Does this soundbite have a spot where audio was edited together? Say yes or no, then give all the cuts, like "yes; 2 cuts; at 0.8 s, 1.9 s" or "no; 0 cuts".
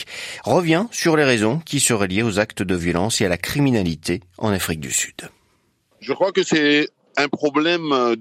no; 0 cuts